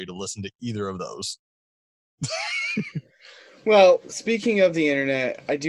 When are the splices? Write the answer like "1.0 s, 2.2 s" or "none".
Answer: none